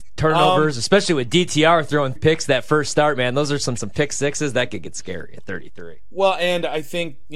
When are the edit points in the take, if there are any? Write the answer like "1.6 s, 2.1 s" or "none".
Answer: 2.2 s, 3.8 s